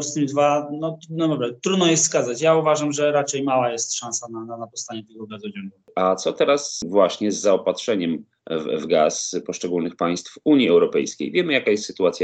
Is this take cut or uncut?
uncut